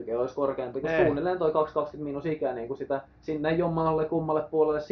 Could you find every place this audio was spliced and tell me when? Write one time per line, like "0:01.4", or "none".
0:03.1